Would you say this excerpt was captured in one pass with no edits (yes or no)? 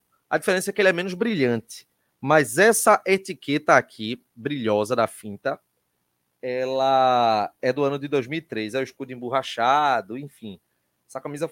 yes